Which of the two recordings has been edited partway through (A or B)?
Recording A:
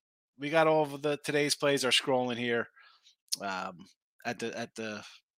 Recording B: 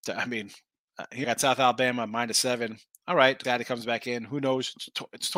B